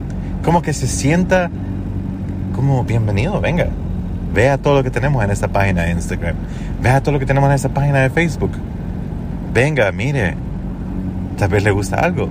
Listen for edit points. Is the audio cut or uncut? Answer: cut